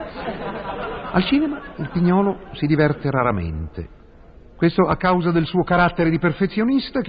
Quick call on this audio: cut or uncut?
uncut